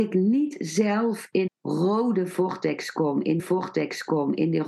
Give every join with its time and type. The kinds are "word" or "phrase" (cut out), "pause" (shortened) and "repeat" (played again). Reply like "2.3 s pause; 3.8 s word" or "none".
1.5 s word; 3.4 s repeat